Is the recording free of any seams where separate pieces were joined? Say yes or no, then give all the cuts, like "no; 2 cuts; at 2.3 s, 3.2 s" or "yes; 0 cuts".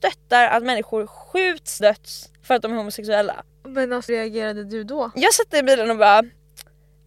no; 3 cuts; at 1.8 s, 3.5 s, 4.1 s